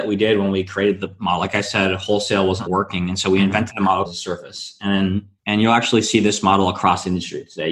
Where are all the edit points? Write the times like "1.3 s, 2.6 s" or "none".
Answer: 2.7 s, 4.0 s, 5.4 s

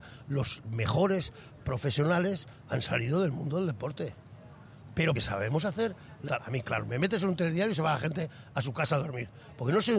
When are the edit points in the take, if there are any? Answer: 5.1 s, 6.3 s

